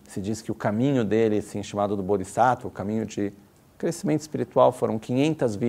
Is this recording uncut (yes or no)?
yes